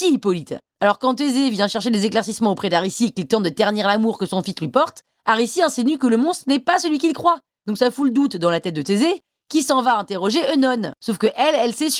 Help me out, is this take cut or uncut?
uncut